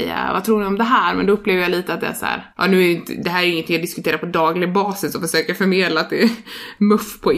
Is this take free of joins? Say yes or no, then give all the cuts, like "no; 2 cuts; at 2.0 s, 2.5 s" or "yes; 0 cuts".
no; 1 cut; at 2.5 s